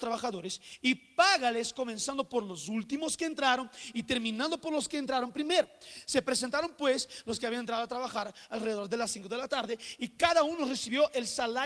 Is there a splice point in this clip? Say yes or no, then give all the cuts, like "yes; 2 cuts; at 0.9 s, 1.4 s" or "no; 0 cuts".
no; 0 cuts